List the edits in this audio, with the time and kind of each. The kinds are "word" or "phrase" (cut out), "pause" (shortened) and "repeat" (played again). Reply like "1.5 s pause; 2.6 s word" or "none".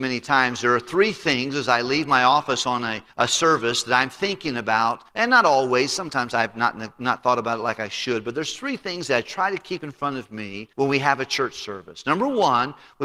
3.1 s pause; 5.1 s pause; 10.7 s pause